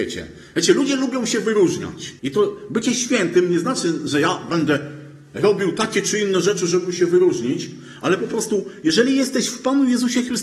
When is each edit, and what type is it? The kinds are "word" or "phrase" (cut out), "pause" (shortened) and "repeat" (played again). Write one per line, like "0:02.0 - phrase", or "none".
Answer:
0:02.2 - pause